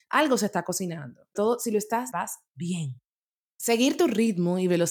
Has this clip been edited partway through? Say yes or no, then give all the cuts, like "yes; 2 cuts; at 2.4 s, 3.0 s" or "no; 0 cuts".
yes; 2 cuts; at 1.3 s, 2.1 s